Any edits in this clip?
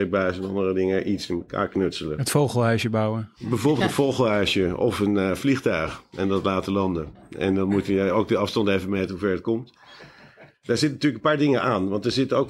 no; 0 cuts

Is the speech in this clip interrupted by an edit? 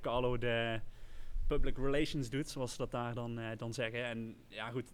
no; 0 cuts

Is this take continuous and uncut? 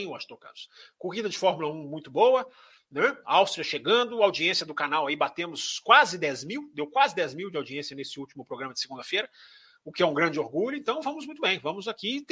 yes; 0 cuts

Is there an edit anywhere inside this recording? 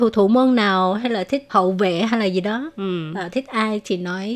yes; 1 cut; at 1.5 s

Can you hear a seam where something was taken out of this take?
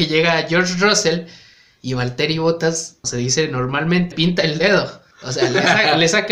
yes; 3 cuts; at 3.0 s, 4.1 s, 5.1 s

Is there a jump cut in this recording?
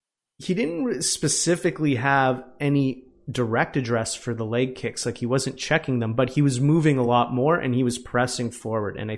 no; 0 cuts

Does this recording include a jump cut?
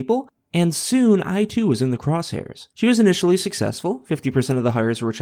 yes; 1 cut; at 2.7 s

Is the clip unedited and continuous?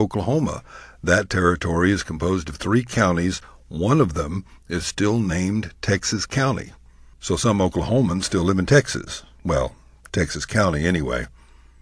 yes; 0 cuts

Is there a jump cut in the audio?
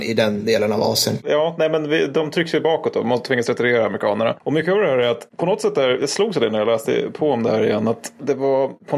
no; 0 cuts

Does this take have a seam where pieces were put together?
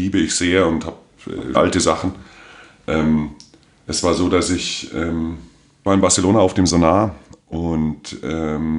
yes; 2 cuts; at 1.5 s, 5.9 s

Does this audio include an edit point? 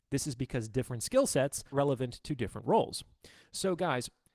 yes; 1 cut; at 1.7 s

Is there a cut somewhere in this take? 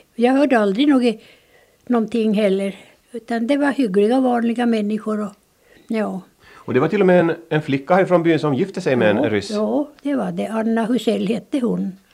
no; 0 cuts

